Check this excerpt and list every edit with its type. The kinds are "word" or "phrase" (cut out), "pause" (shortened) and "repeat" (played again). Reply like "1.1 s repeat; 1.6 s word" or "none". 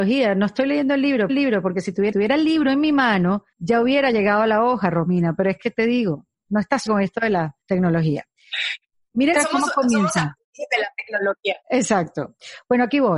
1.3 s repeat; 2.1 s repeat; 3.5 s pause; 6.9 s word; 7.6 s pause; 9.3 s phrase; 11.6 s pause

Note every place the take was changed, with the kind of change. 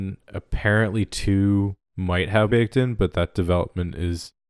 1.8 s pause; 2.5 s word

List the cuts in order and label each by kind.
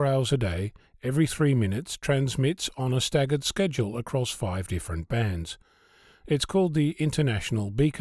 none

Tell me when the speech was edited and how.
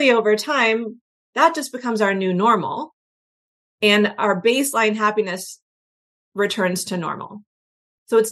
none

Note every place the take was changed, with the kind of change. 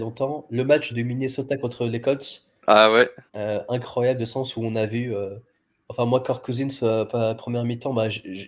0.9 s word; 3.3 s pause; 4.2 s phrase; 7.1 s word

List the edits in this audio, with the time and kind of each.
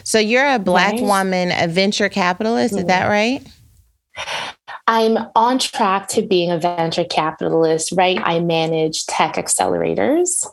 8.2 s word

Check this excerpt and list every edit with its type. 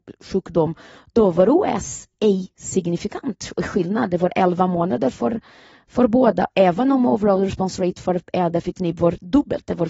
none

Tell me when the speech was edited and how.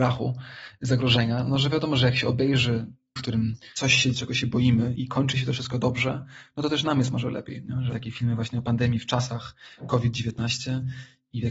3.2 s word; 4.1 s word; 5.0 s word; 7.9 s word

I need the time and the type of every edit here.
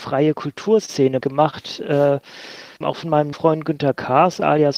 1.2 s word; 2.8 s word; 3.3 s word

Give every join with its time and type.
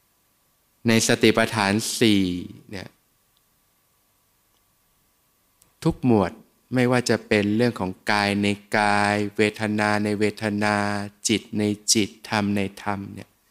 none

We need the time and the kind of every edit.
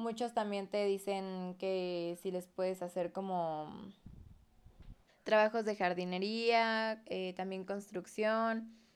5.1 s pause

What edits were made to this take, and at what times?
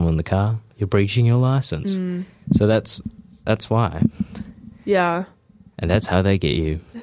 none

